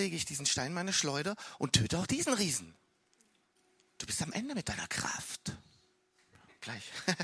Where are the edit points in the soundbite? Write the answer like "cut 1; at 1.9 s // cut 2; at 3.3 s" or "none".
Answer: cut 1; at 3.6 s

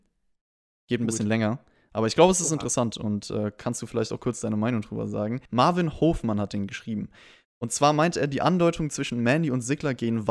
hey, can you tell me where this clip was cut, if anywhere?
cut 1; at 5.4 s

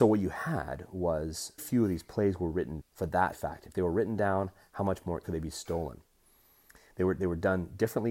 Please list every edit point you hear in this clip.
cut 1; at 1.6 s // cut 2; at 2.8 s // cut 3; at 3.3 s // cut 4; at 5.2 s

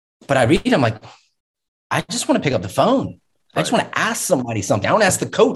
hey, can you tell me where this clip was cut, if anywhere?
none

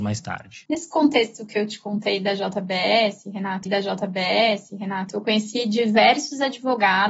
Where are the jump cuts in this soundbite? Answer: cut 1; at 3.7 s

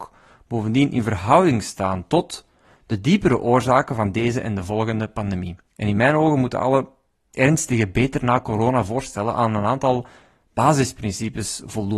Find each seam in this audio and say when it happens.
cut 1; at 5.6 s

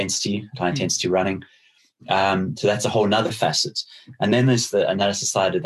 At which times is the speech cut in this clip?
none

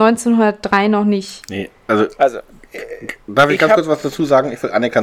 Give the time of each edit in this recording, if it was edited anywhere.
none

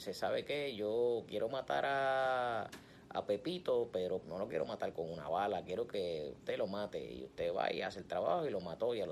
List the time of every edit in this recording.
cut 1; at 4.2 s // cut 2; at 4.9 s

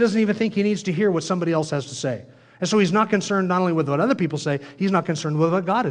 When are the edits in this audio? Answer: none

